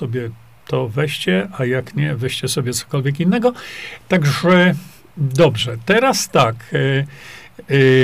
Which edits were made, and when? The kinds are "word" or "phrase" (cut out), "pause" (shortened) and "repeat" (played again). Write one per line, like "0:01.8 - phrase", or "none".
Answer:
none

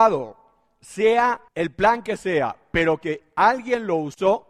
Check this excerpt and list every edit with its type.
0:01.5 - pause

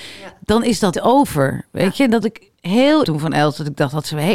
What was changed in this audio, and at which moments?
0:00.9 - word
0:02.2 - word
0:03.0 - word

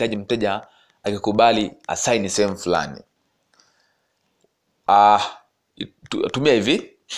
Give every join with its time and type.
none

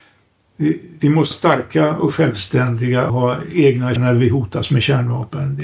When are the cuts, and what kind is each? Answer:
0:01.3 - word
0:03.1 - word
0:04.0 - word

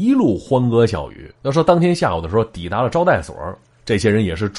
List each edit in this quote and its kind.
0:01.4 - pause

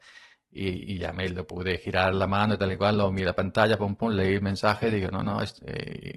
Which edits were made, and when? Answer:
none

